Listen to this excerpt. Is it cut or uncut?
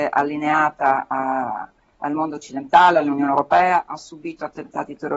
uncut